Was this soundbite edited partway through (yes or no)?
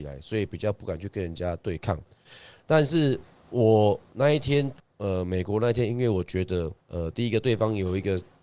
yes